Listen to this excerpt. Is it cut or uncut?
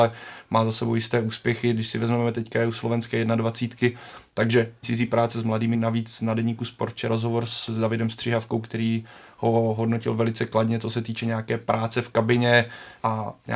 cut